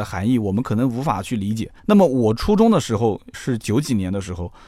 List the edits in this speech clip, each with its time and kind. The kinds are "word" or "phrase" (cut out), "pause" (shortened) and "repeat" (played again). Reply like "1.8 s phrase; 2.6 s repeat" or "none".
1.8 s pause; 3.3 s word